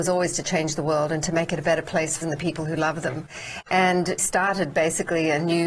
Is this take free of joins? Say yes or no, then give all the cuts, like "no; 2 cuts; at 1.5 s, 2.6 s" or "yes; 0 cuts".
no; 2 cuts; at 2.2 s, 4.2 s